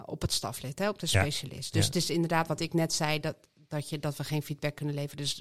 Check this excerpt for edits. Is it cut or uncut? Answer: uncut